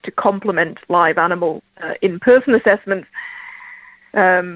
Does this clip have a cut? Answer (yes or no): no